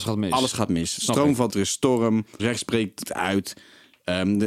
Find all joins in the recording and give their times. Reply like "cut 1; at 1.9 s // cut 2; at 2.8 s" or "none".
cut 1; at 1.5 s // cut 2; at 2.4 s // cut 3; at 3.1 s